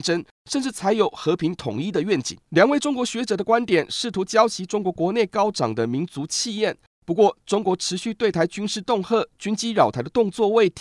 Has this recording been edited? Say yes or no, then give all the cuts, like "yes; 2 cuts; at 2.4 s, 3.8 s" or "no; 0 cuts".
no; 0 cuts